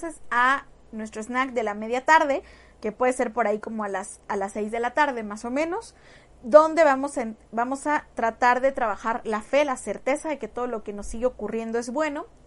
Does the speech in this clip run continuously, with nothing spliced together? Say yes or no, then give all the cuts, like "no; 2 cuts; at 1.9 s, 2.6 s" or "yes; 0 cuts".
yes; 0 cuts